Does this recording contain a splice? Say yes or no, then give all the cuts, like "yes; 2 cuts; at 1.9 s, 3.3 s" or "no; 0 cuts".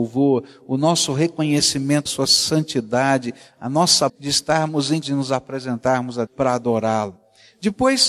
yes; 4 cuts; at 2.1 s, 4.1 s, 5.0 s, 6.3 s